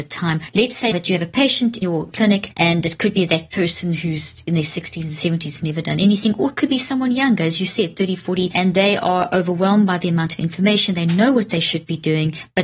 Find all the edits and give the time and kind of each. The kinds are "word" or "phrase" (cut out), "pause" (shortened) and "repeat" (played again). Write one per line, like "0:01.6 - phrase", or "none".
0:00.9 - word
0:01.8 - word